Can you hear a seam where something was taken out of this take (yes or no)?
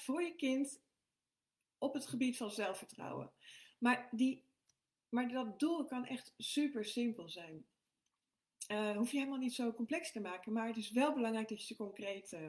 no